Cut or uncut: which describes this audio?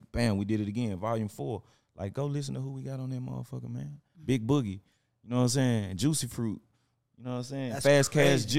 uncut